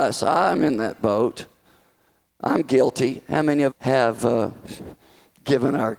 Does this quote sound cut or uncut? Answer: cut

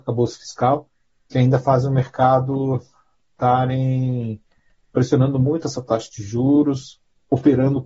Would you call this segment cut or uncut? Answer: uncut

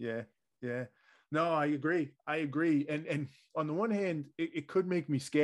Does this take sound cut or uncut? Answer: uncut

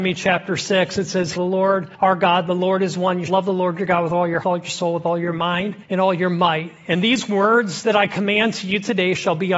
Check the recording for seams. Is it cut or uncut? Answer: cut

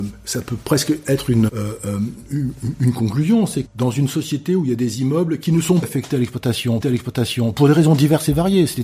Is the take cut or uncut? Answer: cut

